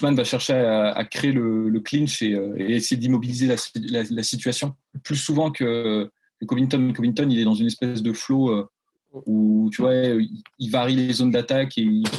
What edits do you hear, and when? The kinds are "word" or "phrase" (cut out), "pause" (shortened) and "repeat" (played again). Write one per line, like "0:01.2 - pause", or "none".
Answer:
none